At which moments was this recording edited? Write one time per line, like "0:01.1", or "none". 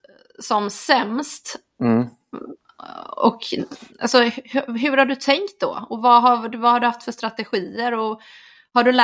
0:03.9